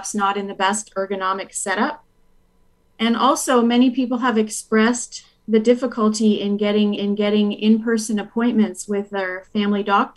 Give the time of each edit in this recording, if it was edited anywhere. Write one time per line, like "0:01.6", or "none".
0:07.0